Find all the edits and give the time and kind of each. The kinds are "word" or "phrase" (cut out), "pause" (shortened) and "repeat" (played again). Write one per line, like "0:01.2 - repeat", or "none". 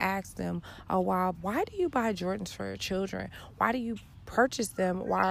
0:01.3 - word